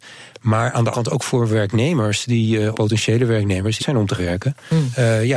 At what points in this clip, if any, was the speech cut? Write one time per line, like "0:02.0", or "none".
0:00.9
0:02.7
0:03.8
0:04.2